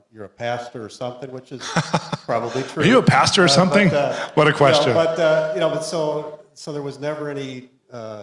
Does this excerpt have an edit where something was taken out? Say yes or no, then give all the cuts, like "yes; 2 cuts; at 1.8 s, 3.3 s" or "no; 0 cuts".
no; 0 cuts